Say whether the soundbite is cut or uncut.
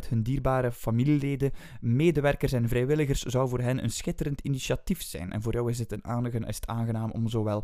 uncut